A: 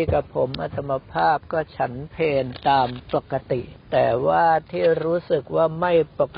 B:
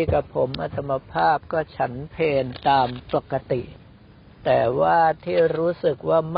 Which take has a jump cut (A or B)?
A